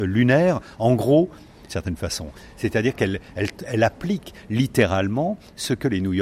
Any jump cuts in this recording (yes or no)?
yes